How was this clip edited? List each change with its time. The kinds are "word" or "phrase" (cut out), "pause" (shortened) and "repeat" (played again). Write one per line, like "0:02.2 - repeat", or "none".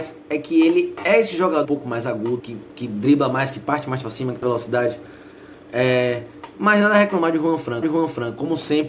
0:01.6 - word
0:02.4 - word
0:04.4 - word
0:07.8 - repeat

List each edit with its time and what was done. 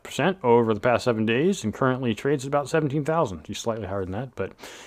0:03.5 - word

